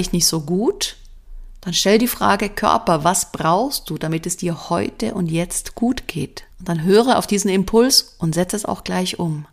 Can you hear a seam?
yes; 1 cut; at 6.5 s

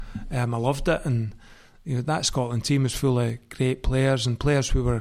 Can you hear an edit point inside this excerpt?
no; 0 cuts

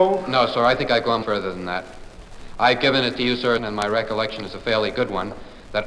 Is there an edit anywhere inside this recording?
yes; 2 cuts; at 1.2 s, 3.6 s

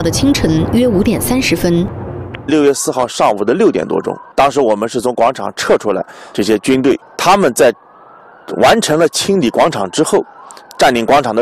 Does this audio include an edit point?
yes; 1 cut; at 7.0 s

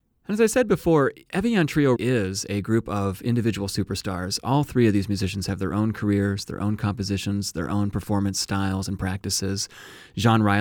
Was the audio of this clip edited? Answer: yes; 1 cut; at 2.0 s

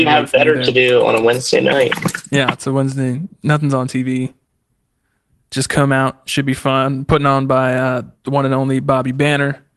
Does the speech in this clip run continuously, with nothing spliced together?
yes; 0 cuts

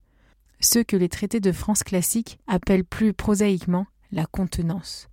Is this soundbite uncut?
no; 1 cut; at 2.4 s

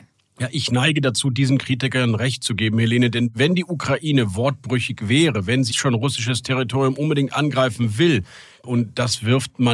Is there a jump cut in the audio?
yes; 1 cut; at 5.7 s

